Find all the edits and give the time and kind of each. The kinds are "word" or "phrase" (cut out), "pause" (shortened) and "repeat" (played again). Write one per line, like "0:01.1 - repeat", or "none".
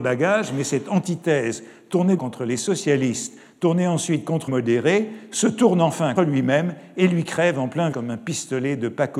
0:02.2 - word
0:04.5 - word
0:06.2 - word
0:07.9 - word

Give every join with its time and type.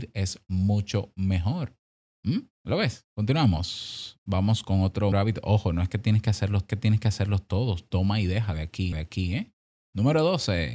0:02.6 - pause
0:03.1 - pause
0:05.1 - word
0:06.7 - repeat
0:08.9 - repeat

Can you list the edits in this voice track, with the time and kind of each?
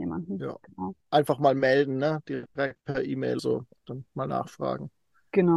0:01.0 - pause
0:03.4 - word

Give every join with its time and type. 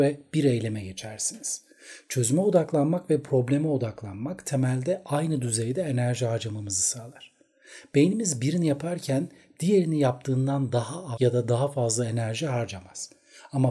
0:11.1 - word

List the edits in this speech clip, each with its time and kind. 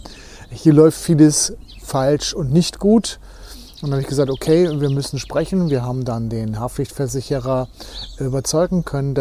none

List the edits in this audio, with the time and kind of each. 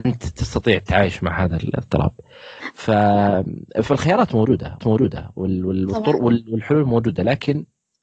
0:04.8 - repeat

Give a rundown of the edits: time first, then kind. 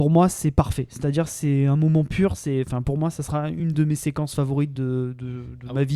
none

